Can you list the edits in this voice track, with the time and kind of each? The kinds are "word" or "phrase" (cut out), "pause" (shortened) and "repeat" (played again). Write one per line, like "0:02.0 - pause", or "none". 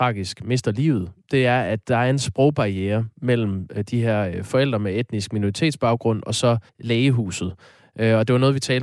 0:06.7 - pause